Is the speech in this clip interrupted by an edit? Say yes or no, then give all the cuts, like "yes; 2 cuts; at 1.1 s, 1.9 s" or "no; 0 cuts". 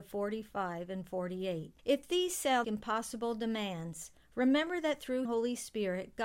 yes; 3 cuts; at 1.8 s, 2.6 s, 5.2 s